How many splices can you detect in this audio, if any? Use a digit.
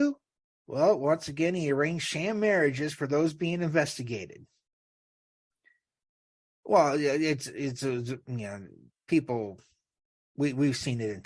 0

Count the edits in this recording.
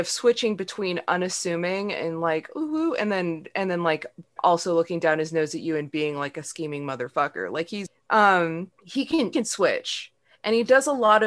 2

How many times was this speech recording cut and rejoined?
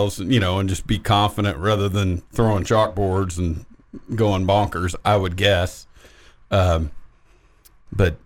0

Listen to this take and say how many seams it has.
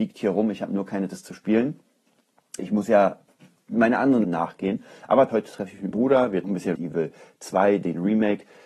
7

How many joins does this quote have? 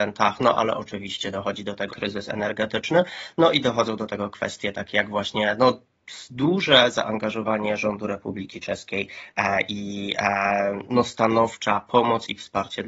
1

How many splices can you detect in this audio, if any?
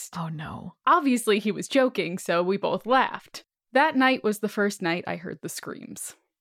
0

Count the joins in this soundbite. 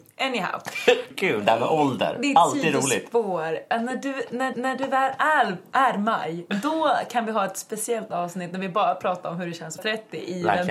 3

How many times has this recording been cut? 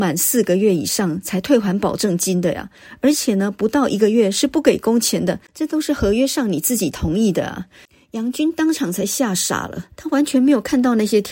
2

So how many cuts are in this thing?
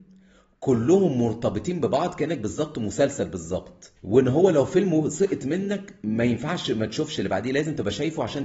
1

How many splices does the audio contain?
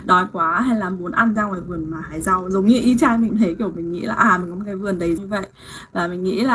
3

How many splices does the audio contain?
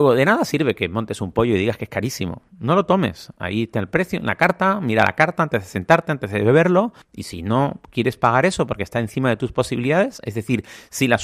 1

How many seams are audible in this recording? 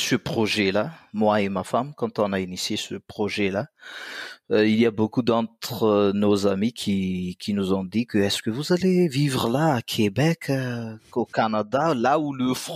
0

